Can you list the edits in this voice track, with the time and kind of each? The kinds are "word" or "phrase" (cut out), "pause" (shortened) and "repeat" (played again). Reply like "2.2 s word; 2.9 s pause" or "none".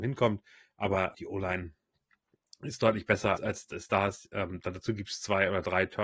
1.1 s word; 3.4 s word